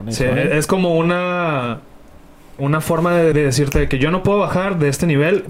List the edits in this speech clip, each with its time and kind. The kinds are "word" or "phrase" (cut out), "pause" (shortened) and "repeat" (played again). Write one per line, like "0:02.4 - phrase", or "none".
0:02.6 - word
0:03.3 - word

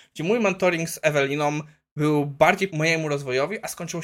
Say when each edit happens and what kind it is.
0:02.7 - word

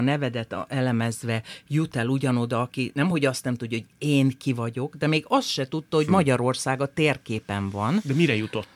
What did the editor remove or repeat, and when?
none

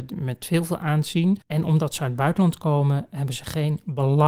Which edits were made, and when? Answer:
0:01.4 - pause

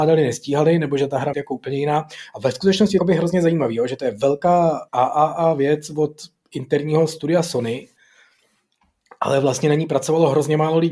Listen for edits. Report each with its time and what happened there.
0:01.3 - phrase
0:03.0 - phrase
0:04.9 - pause

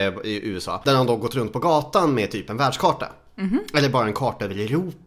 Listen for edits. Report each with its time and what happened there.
none

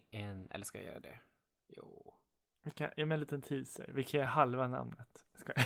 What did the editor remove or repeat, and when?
none

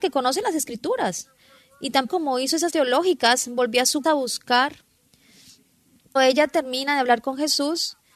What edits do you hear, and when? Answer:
0:02.1 - word
0:02.7 - word
0:04.0 - word
0:06.2 - word

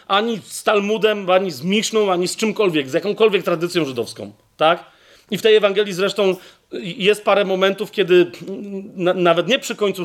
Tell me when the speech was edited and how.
none

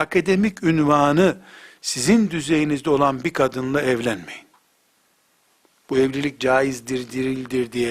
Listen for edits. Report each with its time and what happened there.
none

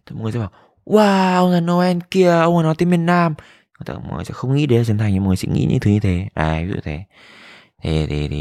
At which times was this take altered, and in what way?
none

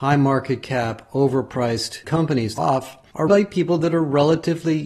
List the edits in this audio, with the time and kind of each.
0:02.0 - word
0:02.6 - phrase
0:03.3 - word

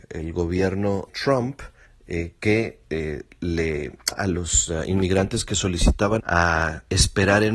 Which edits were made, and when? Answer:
0:01.1 - word
0:01.8 - pause
0:04.1 - word
0:06.2 - word

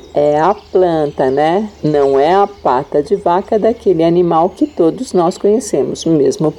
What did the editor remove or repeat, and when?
0:01.8 - pause

